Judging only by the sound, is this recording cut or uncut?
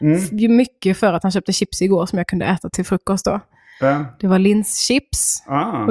uncut